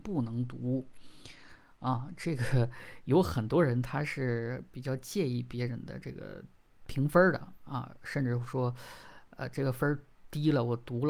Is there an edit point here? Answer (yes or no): no